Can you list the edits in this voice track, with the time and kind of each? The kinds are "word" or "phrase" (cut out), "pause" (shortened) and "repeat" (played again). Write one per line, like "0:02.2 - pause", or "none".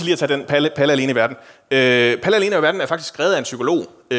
none